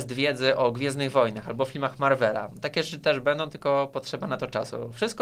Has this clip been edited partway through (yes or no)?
no